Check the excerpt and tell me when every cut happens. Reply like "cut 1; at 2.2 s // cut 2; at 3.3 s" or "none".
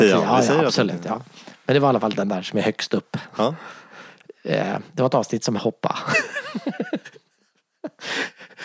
cut 1; at 5.6 s